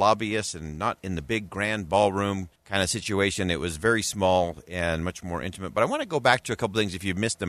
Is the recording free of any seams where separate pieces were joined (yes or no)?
no